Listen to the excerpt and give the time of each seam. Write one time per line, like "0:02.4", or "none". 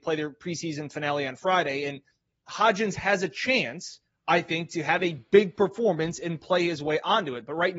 none